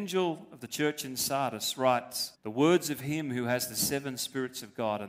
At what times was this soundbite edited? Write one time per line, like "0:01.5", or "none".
0:02.3